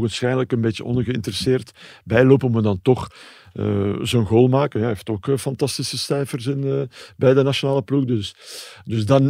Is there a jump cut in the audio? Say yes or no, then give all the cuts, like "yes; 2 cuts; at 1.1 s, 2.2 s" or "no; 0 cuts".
no; 0 cuts